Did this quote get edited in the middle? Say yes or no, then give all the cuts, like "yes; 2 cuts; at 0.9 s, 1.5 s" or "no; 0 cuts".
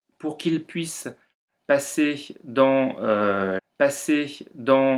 yes; 1 cut; at 3.6 s